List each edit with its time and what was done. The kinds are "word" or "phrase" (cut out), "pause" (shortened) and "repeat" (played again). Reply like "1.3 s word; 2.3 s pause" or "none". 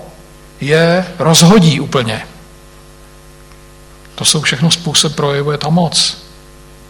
5.1 s phrase